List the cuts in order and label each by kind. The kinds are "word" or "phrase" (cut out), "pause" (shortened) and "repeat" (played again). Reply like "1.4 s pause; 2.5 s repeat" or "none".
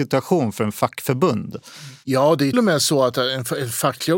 2.5 s word